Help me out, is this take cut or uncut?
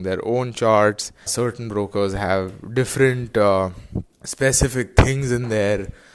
cut